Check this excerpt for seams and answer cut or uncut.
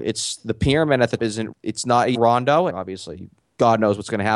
cut